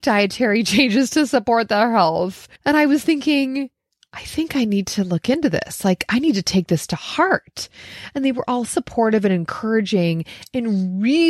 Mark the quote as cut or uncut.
cut